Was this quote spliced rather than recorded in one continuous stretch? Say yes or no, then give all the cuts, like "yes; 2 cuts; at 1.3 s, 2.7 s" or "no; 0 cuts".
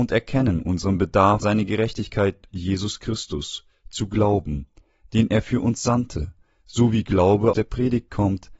yes; 3 cuts; at 1.4 s, 2.5 s, 7.5 s